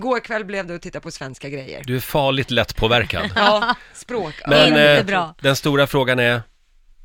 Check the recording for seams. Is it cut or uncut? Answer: uncut